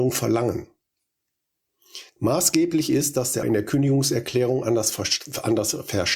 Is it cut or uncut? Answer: cut